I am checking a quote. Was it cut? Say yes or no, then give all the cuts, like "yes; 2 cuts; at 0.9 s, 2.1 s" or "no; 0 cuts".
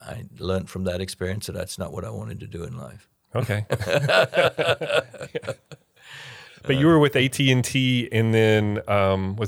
no; 0 cuts